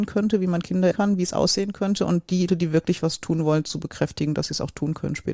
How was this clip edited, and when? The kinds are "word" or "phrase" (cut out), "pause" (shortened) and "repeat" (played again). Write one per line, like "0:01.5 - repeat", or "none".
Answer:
0:00.9 - word
0:02.5 - word